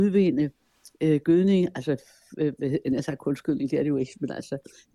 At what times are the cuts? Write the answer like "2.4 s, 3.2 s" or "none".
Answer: none